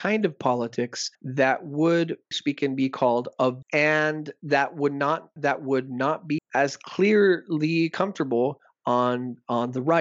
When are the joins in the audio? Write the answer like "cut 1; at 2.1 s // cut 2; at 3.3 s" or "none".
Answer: cut 1; at 1.1 s // cut 2; at 2.3 s // cut 3; at 3.6 s // cut 4; at 5.4 s // cut 5; at 6.4 s

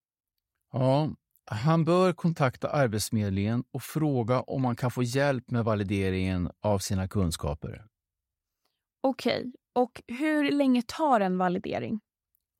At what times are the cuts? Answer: none

